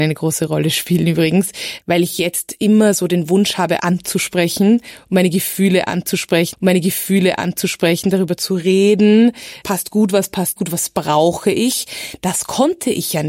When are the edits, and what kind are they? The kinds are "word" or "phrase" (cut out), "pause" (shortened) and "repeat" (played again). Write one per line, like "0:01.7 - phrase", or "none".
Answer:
0:03.8 - word
0:06.5 - repeat
0:09.6 - word
0:10.6 - word